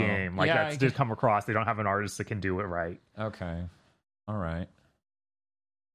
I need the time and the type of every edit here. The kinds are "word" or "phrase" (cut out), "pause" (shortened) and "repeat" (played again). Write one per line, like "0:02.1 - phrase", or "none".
0:00.9 - word